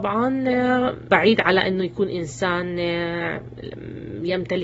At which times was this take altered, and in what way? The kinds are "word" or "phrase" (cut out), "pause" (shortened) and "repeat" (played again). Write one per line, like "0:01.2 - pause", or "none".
0:01.1 - word